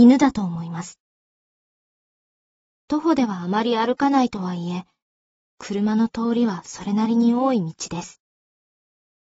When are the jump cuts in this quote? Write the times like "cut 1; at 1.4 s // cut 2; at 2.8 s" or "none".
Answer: none